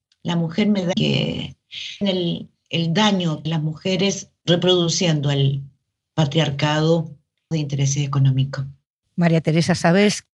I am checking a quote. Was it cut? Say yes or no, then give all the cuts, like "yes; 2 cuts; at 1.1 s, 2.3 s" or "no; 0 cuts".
yes; 5 cuts; at 0.9 s, 2.0 s, 3.5 s, 4.4 s, 7.5 s